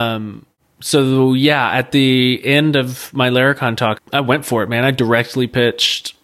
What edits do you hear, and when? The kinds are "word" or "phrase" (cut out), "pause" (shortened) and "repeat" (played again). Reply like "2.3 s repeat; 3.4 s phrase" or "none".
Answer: 3.9 s word